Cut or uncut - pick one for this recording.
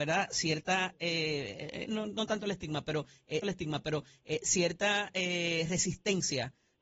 cut